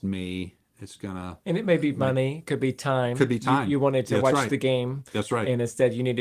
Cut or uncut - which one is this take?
cut